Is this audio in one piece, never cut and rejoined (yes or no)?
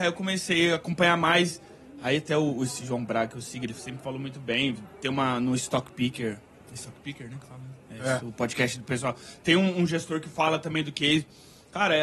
yes